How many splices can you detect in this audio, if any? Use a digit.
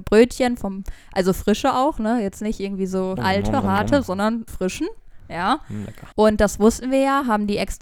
3